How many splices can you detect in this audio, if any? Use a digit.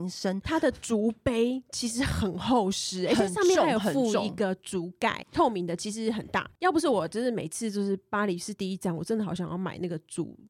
1